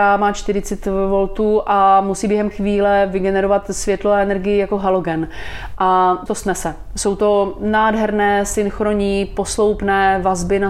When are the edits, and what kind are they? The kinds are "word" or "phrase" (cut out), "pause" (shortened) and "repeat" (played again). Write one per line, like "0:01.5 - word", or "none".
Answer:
0:02.5 - word
0:06.3 - phrase